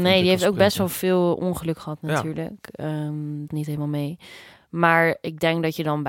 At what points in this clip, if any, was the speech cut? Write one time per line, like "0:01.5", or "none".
0:03.5